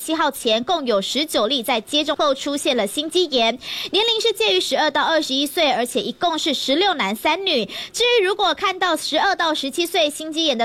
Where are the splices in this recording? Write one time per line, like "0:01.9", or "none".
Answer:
0:02.2